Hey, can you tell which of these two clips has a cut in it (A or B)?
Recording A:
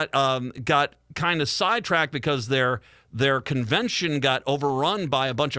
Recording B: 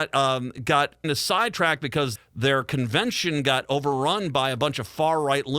B